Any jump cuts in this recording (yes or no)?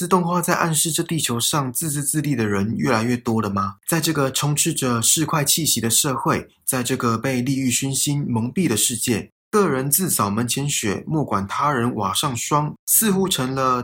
yes